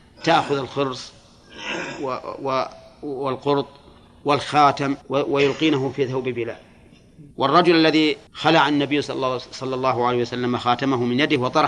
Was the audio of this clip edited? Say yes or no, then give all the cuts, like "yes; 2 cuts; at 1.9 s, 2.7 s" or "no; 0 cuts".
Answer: yes; 3 cuts; at 5.0 s, 7.3 s, 8.3 s